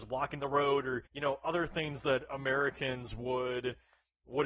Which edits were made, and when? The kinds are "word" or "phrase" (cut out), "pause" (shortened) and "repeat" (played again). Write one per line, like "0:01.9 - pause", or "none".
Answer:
0:01.1 - pause